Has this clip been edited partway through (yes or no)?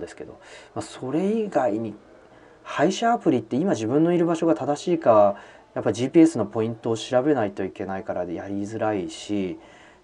no